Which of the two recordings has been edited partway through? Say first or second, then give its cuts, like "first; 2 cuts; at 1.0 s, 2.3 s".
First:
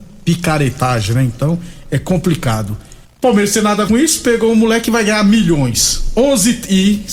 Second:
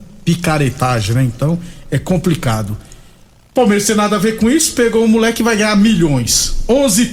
first; 2 cuts; at 3.0 s, 3.9 s